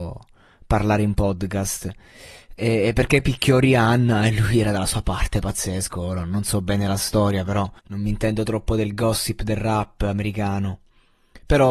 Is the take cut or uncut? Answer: cut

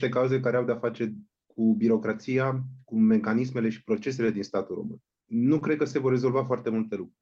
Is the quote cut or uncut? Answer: uncut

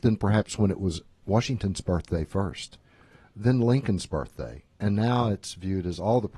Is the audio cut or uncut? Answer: uncut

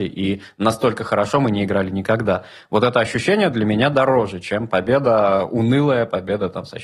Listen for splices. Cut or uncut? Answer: uncut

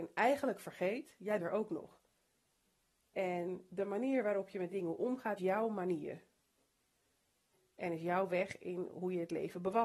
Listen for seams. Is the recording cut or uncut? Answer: cut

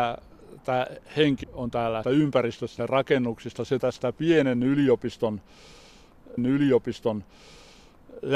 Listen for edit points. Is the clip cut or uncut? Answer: cut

